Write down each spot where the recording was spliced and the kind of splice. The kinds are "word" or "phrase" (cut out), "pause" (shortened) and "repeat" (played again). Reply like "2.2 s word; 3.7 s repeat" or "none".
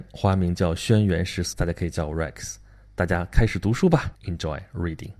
1.5 s word; 4.2 s pause